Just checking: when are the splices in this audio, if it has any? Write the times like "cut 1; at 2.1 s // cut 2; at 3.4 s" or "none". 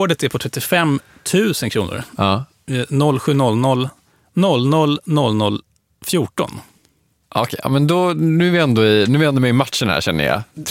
none